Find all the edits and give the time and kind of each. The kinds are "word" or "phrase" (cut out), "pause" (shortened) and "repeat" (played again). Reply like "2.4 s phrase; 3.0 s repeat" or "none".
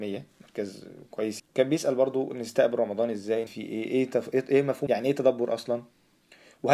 1.4 s word; 3.5 s word; 4.9 s word